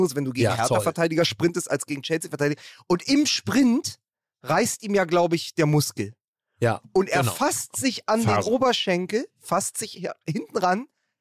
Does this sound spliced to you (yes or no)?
no